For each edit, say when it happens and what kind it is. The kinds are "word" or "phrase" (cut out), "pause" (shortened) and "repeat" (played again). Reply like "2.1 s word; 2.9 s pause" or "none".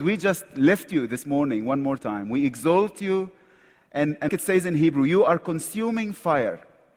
4.3 s word